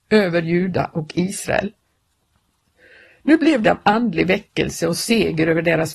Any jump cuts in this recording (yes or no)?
yes